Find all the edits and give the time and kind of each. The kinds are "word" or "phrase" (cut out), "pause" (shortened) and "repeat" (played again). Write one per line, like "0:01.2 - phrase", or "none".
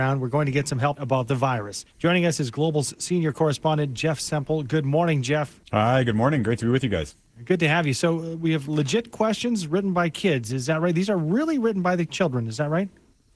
0:01.0 - phrase
0:01.9 - pause
0:05.6 - pause

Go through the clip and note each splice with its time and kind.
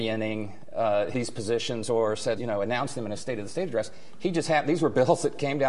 0:01.1 - word
0:02.4 - word

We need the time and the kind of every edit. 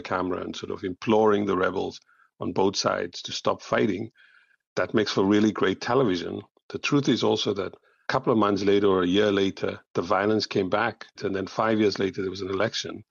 none

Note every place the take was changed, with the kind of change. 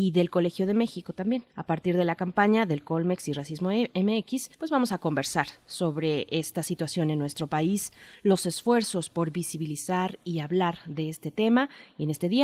0:01.5 - pause
0:04.5 - pause

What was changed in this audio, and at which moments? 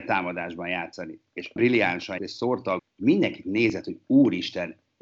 0:01.6 - word
0:02.2 - word
0:02.8 - word
0:03.4 - word

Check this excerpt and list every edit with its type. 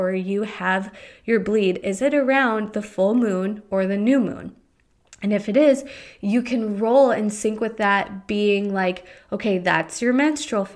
none

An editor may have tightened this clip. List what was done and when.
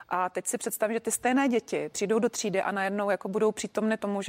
none

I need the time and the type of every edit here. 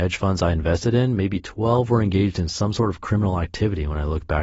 none

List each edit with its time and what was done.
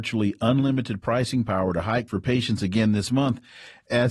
0:02.1 - word

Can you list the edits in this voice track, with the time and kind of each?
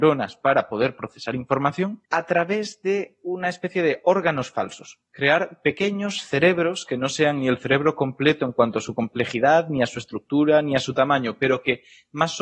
0:02.0 - pause

